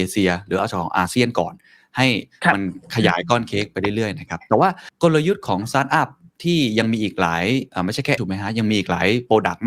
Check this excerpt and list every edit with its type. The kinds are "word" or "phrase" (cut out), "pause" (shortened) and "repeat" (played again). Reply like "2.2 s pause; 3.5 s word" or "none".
8.2 s word